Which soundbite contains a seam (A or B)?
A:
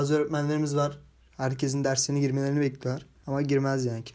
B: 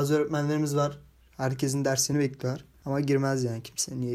B